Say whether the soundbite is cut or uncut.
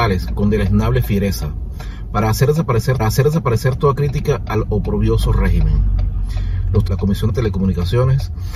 cut